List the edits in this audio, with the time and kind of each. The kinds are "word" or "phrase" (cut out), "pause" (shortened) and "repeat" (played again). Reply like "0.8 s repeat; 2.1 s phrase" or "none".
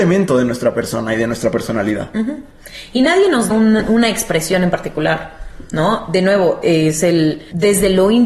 3.5 s word